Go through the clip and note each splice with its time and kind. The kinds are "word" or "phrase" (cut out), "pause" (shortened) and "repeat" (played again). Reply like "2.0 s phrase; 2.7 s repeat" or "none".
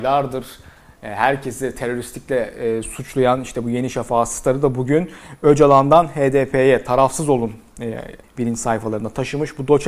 8.2 s word